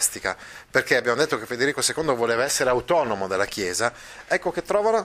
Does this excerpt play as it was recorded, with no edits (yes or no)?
yes